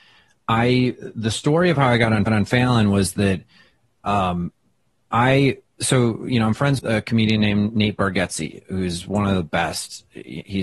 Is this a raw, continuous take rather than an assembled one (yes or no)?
no